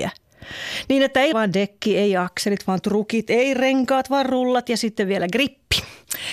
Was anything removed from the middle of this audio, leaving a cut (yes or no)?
yes